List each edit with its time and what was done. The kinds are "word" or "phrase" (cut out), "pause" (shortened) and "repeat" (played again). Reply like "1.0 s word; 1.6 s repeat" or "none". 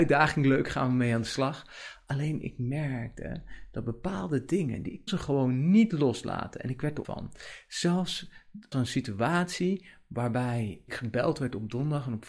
5.1 s word; 7.0 s word; 8.7 s word; 10.9 s word